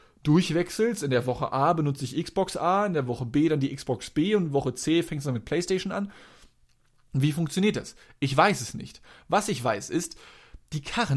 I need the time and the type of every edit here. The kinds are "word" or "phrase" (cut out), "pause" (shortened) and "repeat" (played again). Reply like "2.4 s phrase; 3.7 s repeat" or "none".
none